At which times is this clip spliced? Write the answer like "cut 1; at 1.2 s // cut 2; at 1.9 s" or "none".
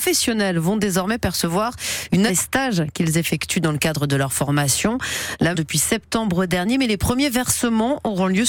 cut 1; at 2.3 s // cut 2; at 5.5 s